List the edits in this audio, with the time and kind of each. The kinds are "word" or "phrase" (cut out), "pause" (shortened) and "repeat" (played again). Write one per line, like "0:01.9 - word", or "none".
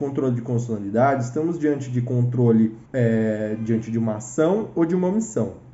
0:02.9 - pause